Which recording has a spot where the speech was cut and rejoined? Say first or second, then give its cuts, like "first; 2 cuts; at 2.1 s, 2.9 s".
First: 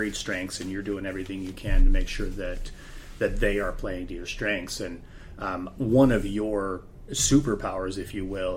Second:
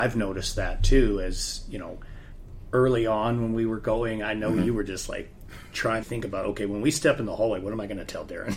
second; 1 cut; at 6.0 s